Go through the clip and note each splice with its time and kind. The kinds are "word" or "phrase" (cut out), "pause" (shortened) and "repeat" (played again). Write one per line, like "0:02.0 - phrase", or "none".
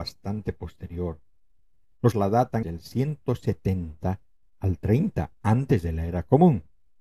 0:02.1 - word
0:02.6 - word